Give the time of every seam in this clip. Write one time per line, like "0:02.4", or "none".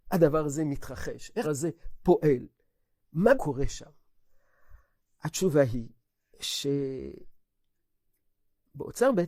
0:01.4
0:03.3
0:06.1